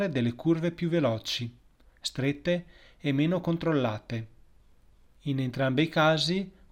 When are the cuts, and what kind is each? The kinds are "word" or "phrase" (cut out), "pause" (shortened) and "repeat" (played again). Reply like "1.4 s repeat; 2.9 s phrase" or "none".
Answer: none